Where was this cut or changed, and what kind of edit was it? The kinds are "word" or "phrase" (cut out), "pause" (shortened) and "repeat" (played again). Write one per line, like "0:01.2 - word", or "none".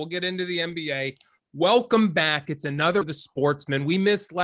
0:03.0 - word